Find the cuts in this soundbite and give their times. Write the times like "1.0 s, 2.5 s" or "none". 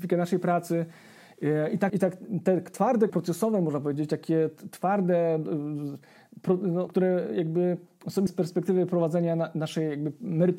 1.9 s, 3.1 s, 6.9 s, 8.3 s